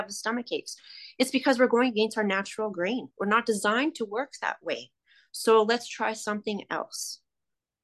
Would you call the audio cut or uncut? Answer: uncut